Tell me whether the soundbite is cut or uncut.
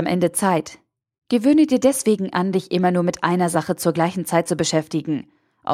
uncut